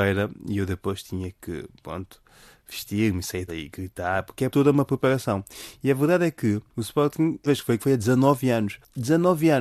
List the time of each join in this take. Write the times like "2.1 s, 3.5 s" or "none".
3.5 s, 4.5 s, 7.5 s, 7.8 s